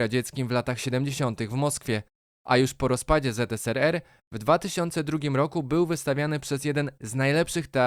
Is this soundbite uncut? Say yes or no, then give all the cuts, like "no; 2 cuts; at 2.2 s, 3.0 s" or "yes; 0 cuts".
yes; 0 cuts